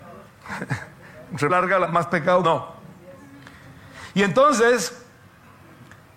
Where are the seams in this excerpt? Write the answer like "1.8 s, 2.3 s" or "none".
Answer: 1.5 s, 1.8 s, 2.4 s